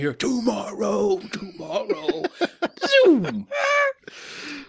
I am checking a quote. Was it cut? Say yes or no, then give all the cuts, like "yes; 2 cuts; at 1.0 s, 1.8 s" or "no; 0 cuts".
yes; 1 cut; at 1.2 s